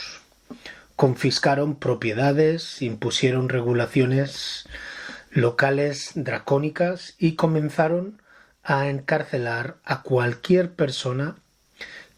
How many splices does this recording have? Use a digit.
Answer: 0